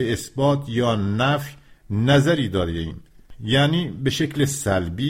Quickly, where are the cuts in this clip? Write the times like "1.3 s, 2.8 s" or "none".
none